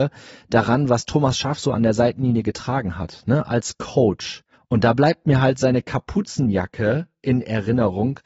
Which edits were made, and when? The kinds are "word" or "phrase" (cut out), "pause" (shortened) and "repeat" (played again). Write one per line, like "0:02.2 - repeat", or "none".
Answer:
0:04.5 - pause